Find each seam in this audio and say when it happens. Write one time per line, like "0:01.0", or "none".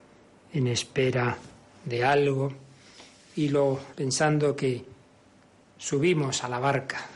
0:03.9